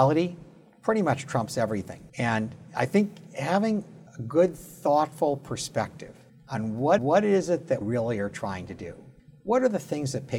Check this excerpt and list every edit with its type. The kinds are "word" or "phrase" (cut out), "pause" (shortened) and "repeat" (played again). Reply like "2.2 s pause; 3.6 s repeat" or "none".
2.1 s pause; 4.1 s pause; 6.3 s pause; 7.0 s repeat; 7.8 s word; 9.2 s pause